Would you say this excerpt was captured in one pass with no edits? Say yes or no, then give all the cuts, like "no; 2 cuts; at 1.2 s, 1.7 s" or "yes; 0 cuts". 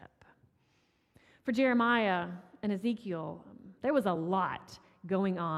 yes; 0 cuts